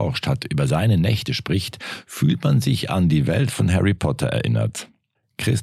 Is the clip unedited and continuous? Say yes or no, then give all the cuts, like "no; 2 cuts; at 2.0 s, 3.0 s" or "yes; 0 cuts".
yes; 0 cuts